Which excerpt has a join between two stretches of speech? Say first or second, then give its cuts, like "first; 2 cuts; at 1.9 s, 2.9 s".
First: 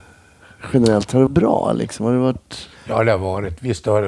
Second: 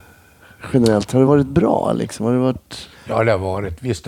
first; 1 cut; at 1.3 s